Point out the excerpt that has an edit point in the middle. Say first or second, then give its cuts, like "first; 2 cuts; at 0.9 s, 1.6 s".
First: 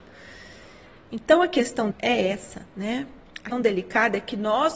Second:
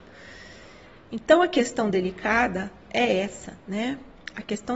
first; 2 cuts; at 1.9 s, 3.5 s